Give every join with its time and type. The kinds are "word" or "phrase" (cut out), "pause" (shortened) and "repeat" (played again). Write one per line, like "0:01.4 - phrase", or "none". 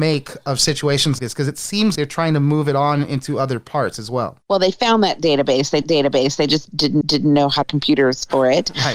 0:01.2 - word
0:02.0 - word
0:04.4 - pause
0:05.8 - repeat
0:07.0 - repeat
0:07.6 - phrase